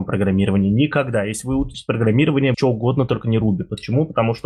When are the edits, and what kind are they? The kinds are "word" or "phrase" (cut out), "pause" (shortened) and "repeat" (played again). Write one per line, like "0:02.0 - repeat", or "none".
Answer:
0:01.7 - word
0:02.5 - word